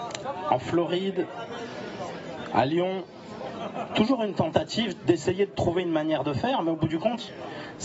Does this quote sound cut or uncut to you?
uncut